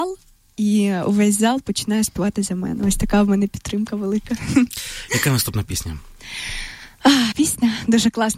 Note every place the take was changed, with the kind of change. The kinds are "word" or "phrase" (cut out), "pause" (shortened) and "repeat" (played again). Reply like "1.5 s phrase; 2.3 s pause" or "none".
7.3 s word